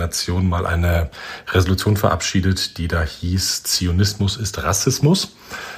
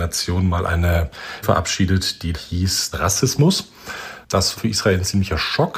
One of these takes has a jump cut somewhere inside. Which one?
second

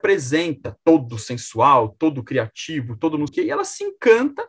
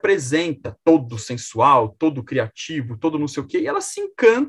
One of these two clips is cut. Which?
first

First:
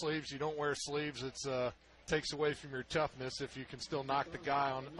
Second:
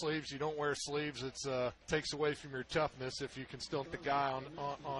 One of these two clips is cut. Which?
second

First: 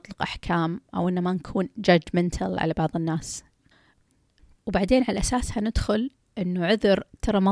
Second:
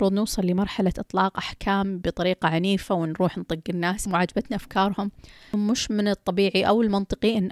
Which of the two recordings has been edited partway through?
second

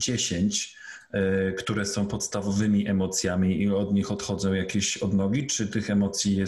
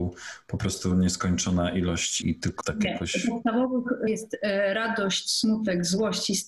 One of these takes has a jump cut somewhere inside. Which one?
second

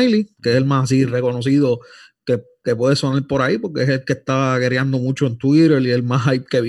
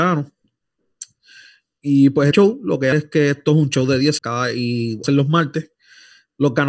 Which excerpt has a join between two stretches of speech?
second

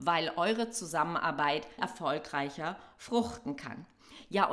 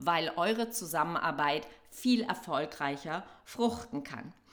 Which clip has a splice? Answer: first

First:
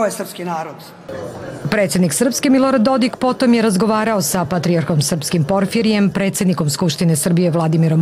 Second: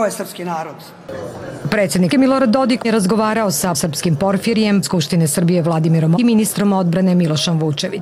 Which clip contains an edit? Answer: second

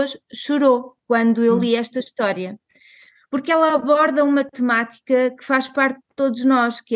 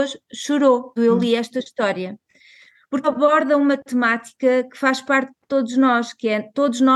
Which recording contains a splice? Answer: second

